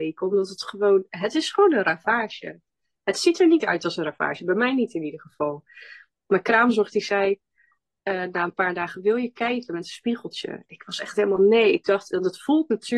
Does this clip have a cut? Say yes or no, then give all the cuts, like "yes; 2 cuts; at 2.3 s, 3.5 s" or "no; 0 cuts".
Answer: no; 0 cuts